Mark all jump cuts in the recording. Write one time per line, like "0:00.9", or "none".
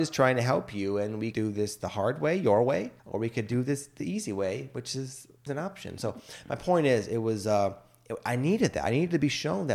0:01.3
0:03.0
0:05.5